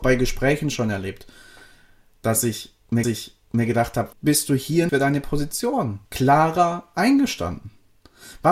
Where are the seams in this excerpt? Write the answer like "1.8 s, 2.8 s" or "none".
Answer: 3.0 s, 4.1 s, 4.9 s, 6.1 s